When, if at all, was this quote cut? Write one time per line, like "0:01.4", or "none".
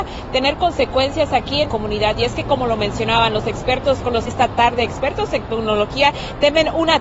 0:01.7
0:04.3